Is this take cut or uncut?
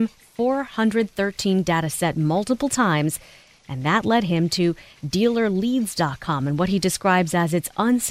cut